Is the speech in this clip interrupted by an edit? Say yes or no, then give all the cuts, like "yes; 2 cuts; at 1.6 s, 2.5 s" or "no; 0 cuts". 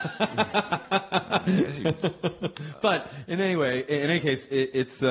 no; 0 cuts